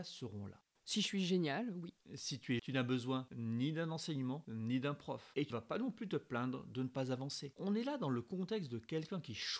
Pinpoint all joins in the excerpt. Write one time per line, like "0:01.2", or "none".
0:02.6
0:05.5